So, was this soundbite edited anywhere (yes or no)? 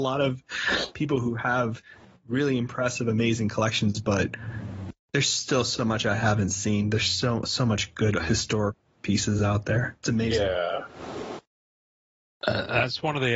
no